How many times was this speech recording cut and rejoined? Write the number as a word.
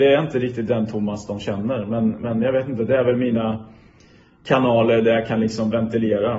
zero